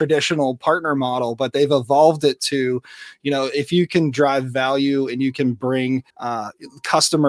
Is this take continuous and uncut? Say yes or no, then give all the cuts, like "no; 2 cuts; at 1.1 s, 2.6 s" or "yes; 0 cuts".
no; 1 cut; at 6.1 s